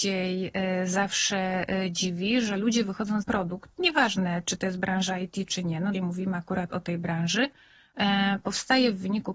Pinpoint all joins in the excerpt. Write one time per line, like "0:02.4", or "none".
0:03.2
0:05.9